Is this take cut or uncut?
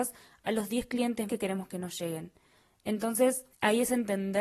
cut